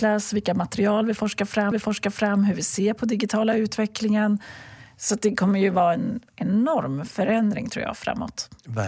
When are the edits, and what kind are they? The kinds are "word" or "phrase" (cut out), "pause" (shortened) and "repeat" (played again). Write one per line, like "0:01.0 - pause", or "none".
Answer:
0:01.7 - repeat
0:06.3 - pause